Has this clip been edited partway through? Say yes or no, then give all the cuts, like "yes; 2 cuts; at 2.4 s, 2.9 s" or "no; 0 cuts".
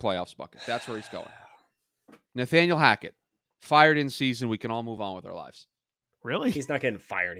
no; 0 cuts